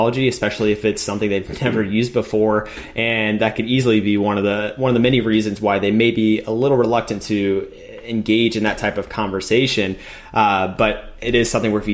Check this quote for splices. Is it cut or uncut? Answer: uncut